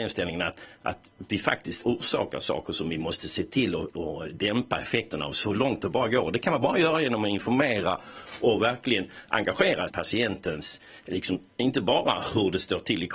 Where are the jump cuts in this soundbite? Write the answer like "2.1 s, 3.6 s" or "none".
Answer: 9.9 s